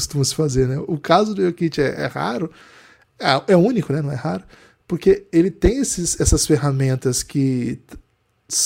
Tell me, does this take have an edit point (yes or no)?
no